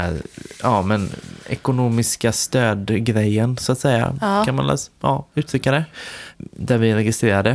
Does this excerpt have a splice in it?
no; 0 cuts

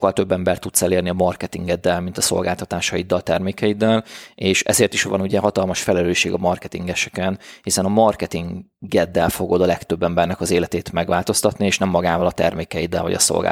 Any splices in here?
no; 0 cuts

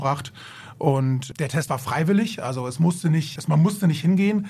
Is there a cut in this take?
yes; 2 cuts; at 1.7 s, 3.4 s

